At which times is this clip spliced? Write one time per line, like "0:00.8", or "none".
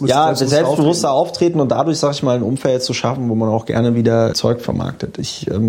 0:04.3